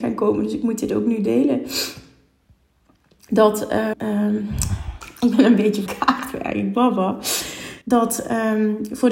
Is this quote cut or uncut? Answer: cut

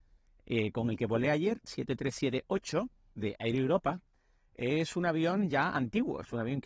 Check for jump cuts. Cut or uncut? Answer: uncut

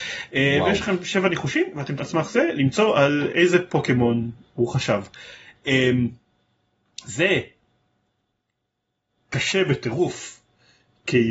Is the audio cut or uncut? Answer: cut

